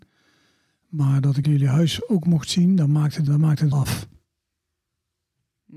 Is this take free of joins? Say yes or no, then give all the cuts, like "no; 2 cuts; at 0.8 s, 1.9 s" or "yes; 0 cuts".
no; 3 cuts; at 1.4 s, 3.3 s, 3.7 s